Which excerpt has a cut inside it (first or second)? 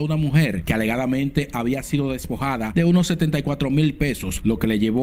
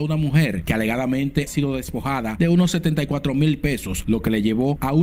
second